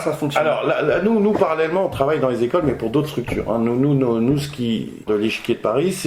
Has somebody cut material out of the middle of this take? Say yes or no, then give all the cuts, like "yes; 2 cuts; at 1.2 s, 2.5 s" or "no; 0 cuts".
yes; 1 cut; at 5.1 s